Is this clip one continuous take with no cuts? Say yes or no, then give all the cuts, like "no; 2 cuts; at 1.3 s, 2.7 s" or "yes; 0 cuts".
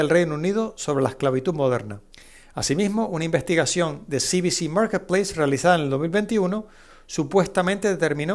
no; 1 cut; at 2.1 s